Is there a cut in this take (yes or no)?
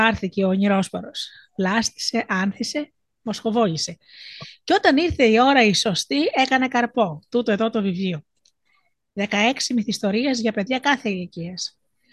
no